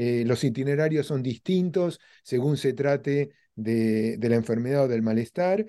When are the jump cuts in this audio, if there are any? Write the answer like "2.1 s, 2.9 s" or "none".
none